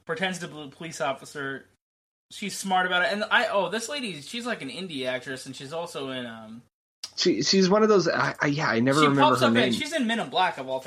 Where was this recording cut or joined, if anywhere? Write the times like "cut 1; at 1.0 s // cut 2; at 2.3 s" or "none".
none